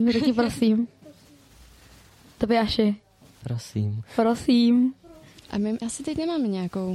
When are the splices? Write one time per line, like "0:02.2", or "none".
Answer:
0:05.8